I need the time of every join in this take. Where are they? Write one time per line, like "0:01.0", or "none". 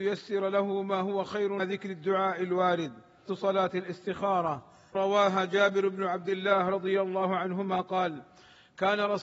0:01.6
0:03.3
0:04.9